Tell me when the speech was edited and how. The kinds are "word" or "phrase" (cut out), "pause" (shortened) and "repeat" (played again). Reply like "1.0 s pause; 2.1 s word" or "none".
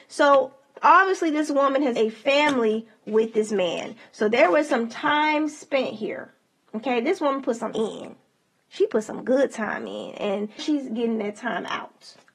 2.0 s word; 7.7 s word; 10.6 s word